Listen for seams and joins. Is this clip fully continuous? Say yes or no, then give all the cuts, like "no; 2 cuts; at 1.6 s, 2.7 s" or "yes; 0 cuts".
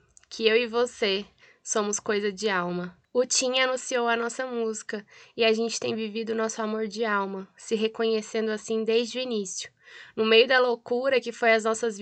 yes; 0 cuts